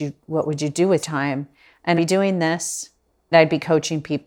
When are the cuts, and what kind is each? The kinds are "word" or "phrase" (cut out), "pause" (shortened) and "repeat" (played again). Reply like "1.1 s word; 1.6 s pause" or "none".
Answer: 1.0 s word; 2.0 s word; 3.3 s word